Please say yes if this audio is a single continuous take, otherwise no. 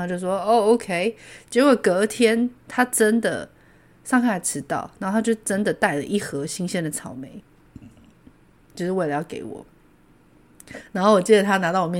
yes